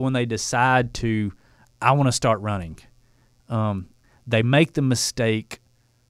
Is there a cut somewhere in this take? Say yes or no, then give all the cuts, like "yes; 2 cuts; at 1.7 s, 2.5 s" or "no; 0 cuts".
no; 0 cuts